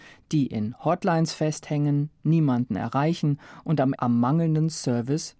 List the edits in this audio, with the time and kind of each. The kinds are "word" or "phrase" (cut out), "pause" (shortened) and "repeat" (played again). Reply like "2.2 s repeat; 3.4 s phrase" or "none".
4.0 s word